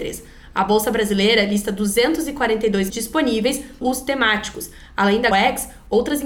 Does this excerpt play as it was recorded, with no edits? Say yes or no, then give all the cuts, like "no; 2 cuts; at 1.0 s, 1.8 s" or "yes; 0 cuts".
no; 3 cuts; at 2.9 s, 3.8 s, 5.3 s